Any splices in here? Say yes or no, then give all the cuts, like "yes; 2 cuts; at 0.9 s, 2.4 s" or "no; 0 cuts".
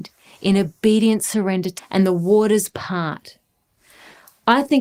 yes; 1 cut; at 1.8 s